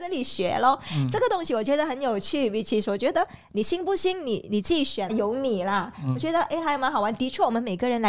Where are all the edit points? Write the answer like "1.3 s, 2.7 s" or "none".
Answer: 5.1 s

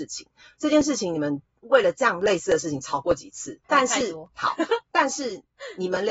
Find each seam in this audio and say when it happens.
3.6 s

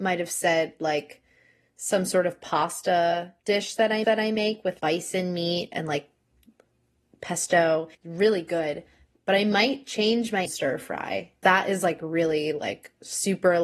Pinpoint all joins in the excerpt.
3.4 s, 4.0 s, 4.8 s, 7.9 s, 10.4 s, 11.4 s

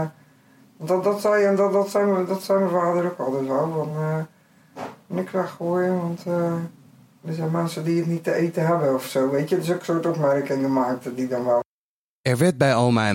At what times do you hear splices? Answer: none

